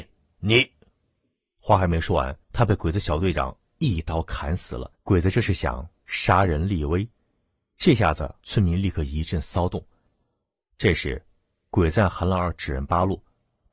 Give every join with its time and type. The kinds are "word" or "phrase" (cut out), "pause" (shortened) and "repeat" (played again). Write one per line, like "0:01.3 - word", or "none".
0:02.4 - pause
0:04.9 - pause
0:08.4 - pause